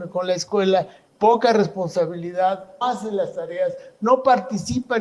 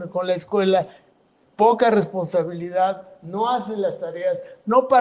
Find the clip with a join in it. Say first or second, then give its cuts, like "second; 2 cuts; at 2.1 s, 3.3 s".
first; 2 cuts; at 1.1 s, 2.8 s